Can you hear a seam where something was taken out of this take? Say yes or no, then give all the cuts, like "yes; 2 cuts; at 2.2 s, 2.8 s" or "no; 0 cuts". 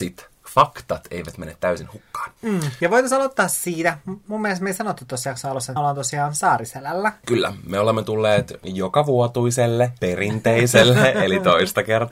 yes; 1 cut; at 5.8 s